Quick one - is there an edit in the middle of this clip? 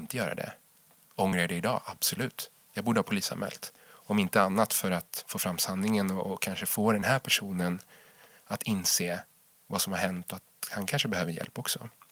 no; 0 cuts

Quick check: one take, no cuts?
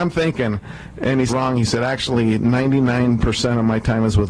no; 1 cut; at 1.3 s

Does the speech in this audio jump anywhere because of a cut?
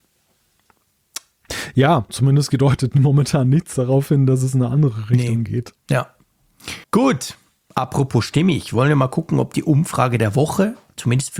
yes; 2 cuts; at 2.1 s, 6.8 s

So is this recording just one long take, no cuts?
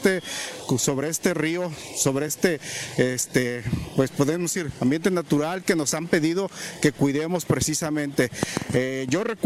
yes; 0 cuts

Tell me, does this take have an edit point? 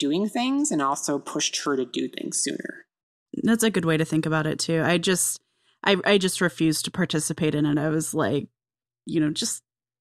no; 0 cuts

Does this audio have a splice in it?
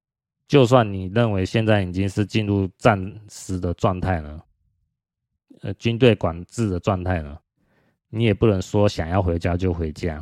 no; 0 cuts

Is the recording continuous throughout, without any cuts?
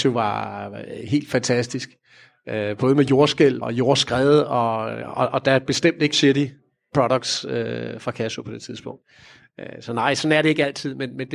no; 3 cuts; at 3.6 s, 5.0 s, 6.1 s

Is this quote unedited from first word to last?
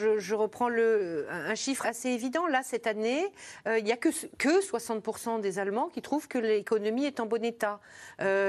no; 1 cut; at 1.8 s

